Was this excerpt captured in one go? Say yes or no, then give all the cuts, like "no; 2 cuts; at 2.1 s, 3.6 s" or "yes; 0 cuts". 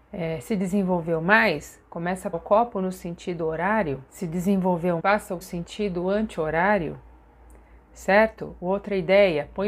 no; 4 cuts; at 2.3 s, 4.1 s, 5.0 s, 5.4 s